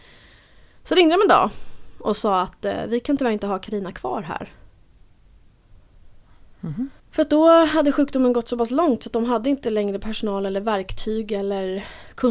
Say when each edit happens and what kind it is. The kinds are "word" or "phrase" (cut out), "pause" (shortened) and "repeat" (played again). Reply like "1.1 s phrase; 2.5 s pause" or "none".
7.0 s pause